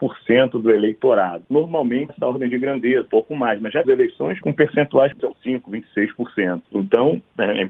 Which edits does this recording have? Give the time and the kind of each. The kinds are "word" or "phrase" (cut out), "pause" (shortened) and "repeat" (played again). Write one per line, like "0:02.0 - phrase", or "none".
0:02.1 - word
0:03.1 - word
0:03.8 - word
0:04.4 - word
0:05.3 - word